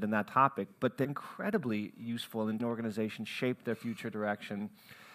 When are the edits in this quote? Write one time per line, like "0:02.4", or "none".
0:01.0
0:02.6